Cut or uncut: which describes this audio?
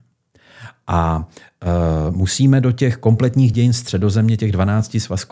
uncut